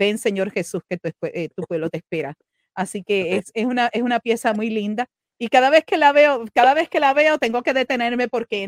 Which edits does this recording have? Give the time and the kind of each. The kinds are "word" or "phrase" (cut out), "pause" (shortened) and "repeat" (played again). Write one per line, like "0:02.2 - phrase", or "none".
none